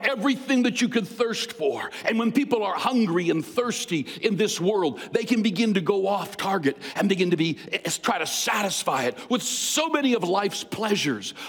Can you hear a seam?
no; 0 cuts

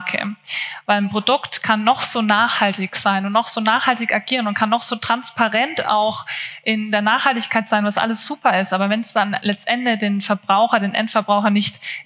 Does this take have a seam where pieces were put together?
no; 0 cuts

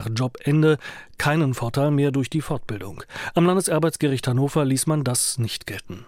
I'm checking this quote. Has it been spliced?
no; 0 cuts

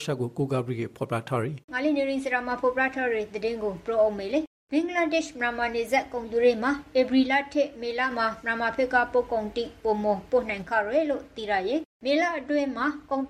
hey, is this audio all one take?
no; 2 cuts; at 1.6 s, 11.9 s

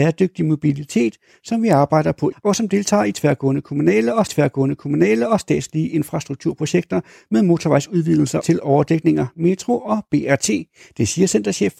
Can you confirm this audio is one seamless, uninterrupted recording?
no; 3 cuts; at 2.3 s, 4.3 s, 8.4 s

